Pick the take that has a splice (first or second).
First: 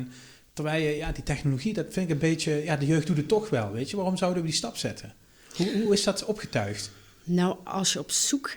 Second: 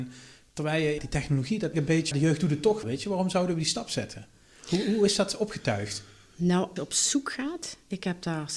second